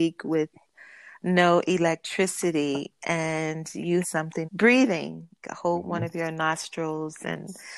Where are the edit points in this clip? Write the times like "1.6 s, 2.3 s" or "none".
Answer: 4.0 s, 4.4 s, 5.4 s